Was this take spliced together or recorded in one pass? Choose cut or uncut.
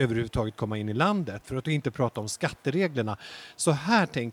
uncut